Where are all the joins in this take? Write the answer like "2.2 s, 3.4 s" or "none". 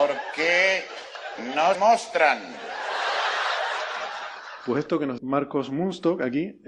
1.7 s, 5.2 s